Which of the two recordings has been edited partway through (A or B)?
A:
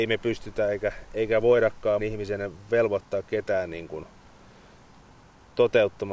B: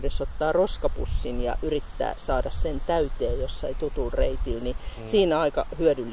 A